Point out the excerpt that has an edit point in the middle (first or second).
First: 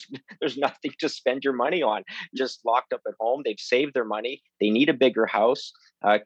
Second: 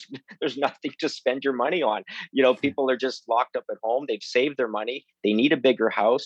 first